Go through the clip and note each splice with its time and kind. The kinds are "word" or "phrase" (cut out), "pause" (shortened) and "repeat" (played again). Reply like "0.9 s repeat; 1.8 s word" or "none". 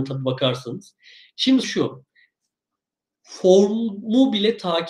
1.6 s word